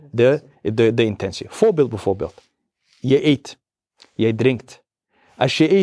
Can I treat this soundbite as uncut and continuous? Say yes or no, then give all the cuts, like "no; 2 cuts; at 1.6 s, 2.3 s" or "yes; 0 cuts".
yes; 0 cuts